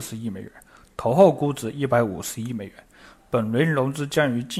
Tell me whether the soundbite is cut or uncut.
uncut